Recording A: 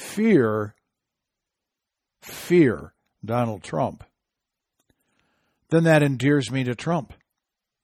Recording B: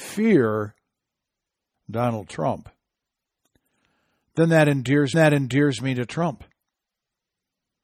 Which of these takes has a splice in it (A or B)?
B